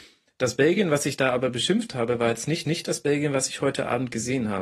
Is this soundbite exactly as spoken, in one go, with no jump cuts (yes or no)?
no